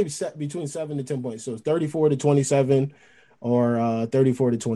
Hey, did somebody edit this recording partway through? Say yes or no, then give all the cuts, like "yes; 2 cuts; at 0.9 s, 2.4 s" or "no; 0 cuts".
no; 0 cuts